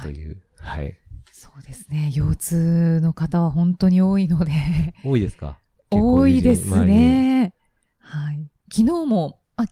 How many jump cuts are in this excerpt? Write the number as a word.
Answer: zero